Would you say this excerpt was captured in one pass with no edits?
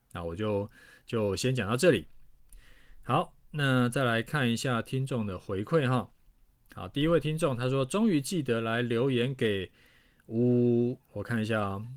yes; 0 cuts

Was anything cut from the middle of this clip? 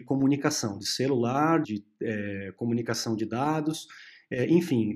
yes; 1 cut; at 1.6 s

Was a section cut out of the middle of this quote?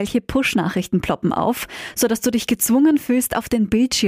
no; 0 cuts

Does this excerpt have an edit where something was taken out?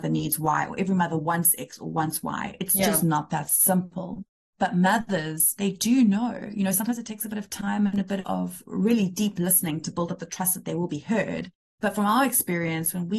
no; 0 cuts

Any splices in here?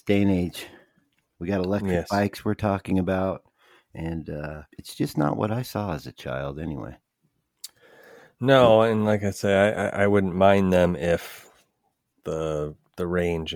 yes; 1 cut; at 4.7 s

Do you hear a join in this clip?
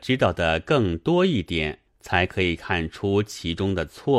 yes; 1 cut; at 1.9 s

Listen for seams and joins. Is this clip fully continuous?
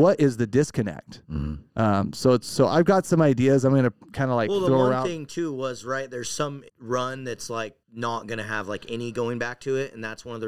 no; 4 cuts; at 1.7 s, 4.0 s, 6.7 s, 7.8 s

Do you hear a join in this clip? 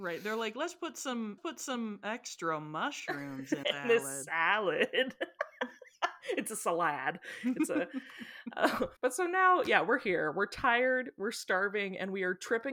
yes; 3 cuts; at 1.4 s, 3.6 s, 9.0 s

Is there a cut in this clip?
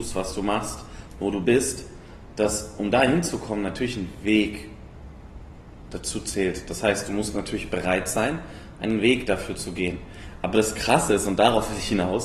no; 0 cuts

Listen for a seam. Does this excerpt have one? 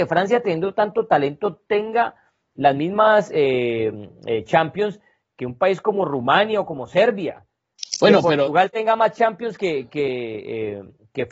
no; 0 cuts

